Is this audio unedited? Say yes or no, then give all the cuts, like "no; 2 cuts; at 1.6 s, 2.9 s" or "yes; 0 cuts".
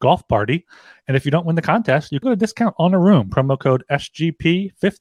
no; 2 cuts; at 2.2 s, 3.3 s